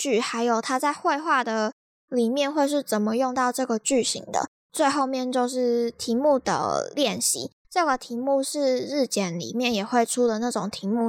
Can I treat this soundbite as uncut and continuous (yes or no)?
yes